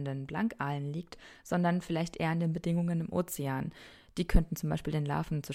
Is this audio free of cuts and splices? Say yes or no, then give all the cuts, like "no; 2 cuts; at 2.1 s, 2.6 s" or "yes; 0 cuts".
yes; 0 cuts